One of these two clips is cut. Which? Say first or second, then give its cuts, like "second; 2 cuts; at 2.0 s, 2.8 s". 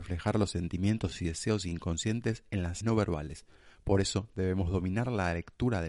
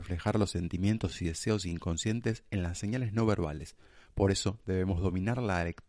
first; 1 cut; at 2.8 s